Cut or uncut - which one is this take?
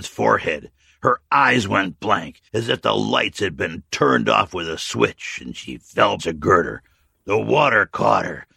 cut